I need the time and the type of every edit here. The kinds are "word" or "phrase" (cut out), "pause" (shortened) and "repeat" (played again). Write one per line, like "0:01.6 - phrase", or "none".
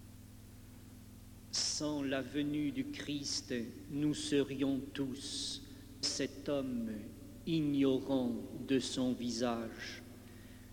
0:01.4 - pause
0:06.0 - word